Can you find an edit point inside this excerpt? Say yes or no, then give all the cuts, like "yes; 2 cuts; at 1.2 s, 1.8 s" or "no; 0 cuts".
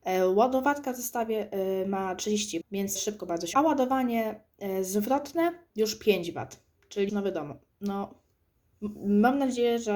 yes; 5 cuts; at 2.6 s, 3.0 s, 3.5 s, 5.7 s, 7.1 s